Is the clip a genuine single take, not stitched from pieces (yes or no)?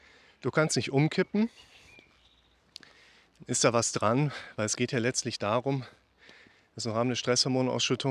yes